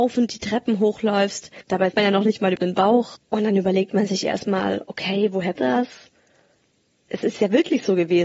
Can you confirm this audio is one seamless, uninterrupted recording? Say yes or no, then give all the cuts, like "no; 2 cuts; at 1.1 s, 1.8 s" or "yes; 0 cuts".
no; 3 cuts; at 1.9 s, 2.5 s, 5.6 s